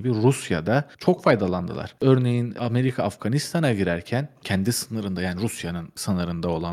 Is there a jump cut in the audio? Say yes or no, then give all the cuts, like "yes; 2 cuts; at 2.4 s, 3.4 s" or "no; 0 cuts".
yes; 1 cut; at 0.9 s